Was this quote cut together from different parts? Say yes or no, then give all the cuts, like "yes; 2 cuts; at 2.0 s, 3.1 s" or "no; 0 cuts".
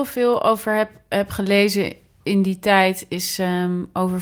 no; 0 cuts